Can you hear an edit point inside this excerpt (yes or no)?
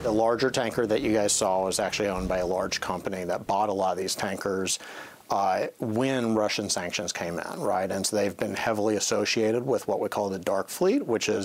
no